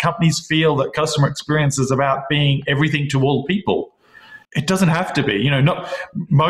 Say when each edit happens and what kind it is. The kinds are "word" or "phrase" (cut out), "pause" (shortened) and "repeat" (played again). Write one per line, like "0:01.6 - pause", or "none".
0:04.4 - pause